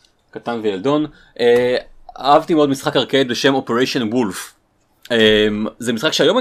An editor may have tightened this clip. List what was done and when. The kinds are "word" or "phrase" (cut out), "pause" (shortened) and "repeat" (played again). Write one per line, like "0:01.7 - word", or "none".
none